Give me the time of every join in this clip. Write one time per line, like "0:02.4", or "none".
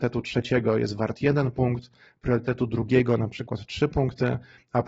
none